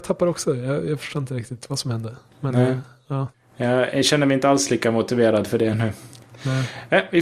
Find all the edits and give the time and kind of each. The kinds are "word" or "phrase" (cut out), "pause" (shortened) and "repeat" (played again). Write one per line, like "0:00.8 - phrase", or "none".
0:03.3 - pause